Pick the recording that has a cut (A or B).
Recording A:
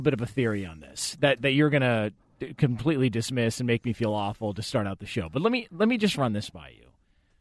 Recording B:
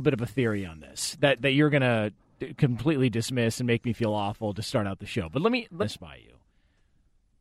B